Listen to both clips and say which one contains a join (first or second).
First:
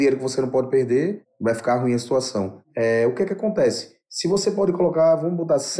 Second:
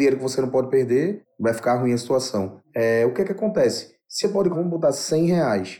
second